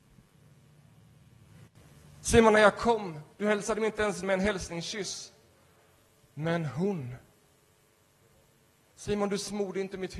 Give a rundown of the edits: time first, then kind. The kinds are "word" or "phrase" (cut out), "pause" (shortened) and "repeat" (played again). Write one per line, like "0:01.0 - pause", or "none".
0:03.3 - pause
0:04.2 - word

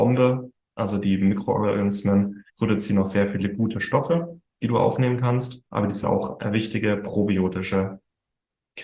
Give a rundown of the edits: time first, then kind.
0:02.5 - pause
0:05.7 - pause
0:06.0 - word

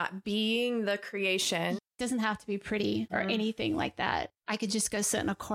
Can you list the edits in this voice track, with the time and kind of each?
0:01.9 - pause
0:04.3 - pause

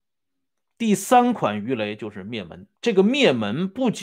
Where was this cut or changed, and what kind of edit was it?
0:02.8 - pause

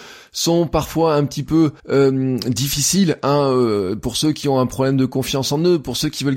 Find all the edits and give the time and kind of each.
0:01.8 - pause

